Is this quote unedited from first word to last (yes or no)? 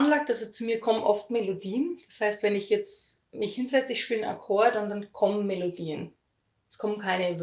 no